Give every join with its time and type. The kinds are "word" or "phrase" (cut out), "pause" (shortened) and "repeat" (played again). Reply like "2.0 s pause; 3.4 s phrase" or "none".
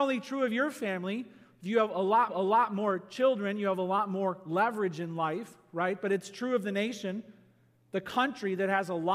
2.3 s repeat